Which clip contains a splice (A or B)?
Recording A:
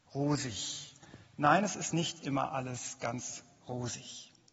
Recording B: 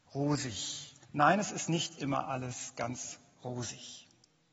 B